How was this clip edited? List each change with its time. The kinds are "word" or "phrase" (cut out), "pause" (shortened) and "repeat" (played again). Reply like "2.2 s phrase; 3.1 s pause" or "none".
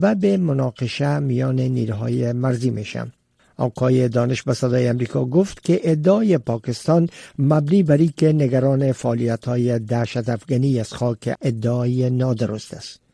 11.3 s phrase